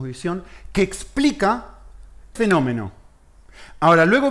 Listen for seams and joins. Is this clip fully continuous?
no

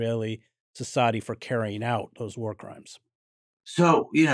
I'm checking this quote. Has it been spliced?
no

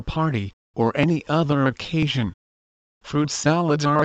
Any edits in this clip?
no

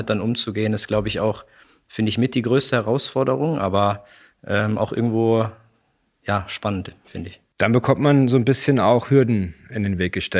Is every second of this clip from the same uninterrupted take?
yes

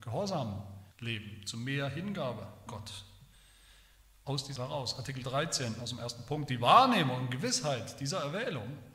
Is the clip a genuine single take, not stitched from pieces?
no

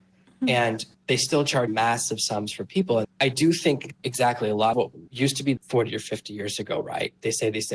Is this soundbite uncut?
no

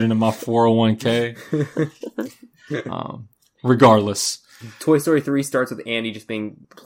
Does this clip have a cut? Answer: no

